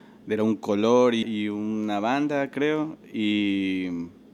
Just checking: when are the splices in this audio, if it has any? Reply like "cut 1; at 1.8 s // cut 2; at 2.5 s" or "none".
cut 1; at 1.2 s